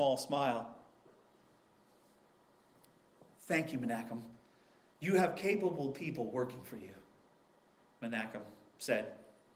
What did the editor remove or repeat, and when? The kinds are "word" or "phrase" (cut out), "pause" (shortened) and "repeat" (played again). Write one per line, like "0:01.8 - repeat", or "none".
none